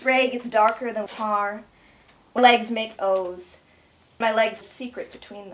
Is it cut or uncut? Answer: cut